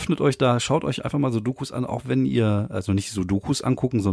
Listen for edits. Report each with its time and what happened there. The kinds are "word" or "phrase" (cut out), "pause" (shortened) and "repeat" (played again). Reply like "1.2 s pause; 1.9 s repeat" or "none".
none